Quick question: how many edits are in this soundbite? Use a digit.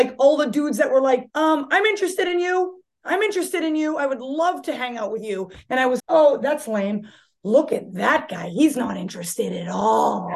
2